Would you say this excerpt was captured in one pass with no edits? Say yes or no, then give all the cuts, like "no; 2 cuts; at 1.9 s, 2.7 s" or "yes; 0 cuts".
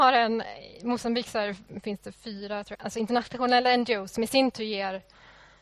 no; 1 cut; at 2.7 s